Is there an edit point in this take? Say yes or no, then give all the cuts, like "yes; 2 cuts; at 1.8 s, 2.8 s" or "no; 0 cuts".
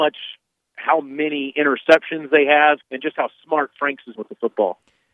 yes; 2 cuts; at 2.8 s, 4.2 s